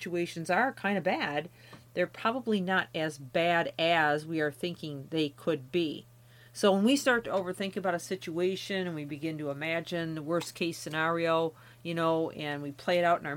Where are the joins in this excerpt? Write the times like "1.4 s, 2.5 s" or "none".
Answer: none